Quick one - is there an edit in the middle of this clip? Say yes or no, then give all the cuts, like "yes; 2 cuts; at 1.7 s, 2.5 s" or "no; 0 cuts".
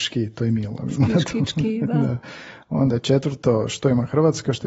no; 0 cuts